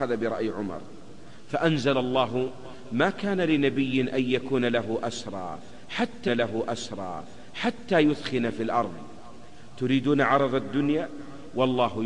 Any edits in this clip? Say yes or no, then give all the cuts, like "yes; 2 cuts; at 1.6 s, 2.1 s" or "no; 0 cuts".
yes; 1 cut; at 6.3 s